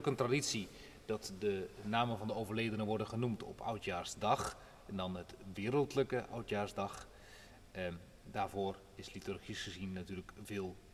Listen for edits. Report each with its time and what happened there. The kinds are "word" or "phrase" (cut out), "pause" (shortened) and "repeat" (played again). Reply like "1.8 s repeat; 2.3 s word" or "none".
none